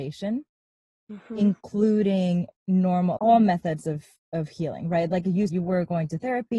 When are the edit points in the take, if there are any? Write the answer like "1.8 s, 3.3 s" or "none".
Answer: 3.2 s, 5.5 s